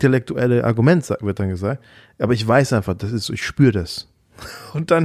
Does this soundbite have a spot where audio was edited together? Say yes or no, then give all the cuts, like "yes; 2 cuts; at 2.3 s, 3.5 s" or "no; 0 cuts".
no; 0 cuts